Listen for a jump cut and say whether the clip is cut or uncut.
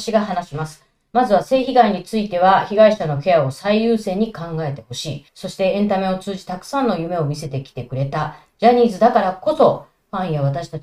cut